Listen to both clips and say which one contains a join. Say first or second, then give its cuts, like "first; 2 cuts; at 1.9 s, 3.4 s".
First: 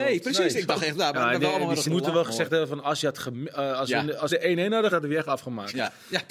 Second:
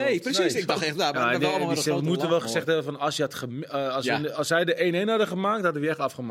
first; 3 cuts; at 1.8 s, 4.3 s, 4.9 s